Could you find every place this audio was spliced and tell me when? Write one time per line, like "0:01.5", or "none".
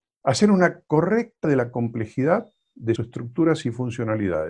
0:01.4
0:03.0

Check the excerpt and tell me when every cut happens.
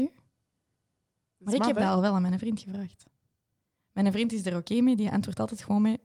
none

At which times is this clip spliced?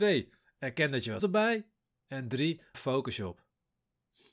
0:01.2
0:02.7

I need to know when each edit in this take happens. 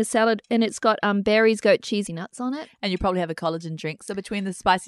0:02.1

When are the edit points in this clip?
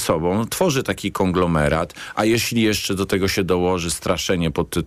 none

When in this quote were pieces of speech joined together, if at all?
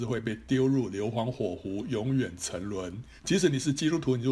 0:03.2

